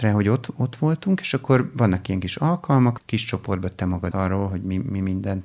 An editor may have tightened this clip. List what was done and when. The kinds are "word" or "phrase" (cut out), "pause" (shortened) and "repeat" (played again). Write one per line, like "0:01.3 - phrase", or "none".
0:03.0 - word
0:04.1 - word